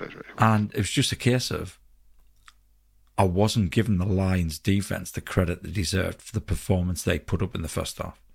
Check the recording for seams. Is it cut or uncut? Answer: uncut